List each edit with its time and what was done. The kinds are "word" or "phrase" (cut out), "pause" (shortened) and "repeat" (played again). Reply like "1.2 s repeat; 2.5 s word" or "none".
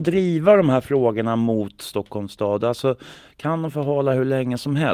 none